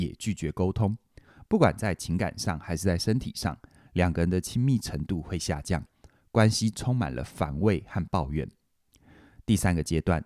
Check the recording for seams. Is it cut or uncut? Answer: uncut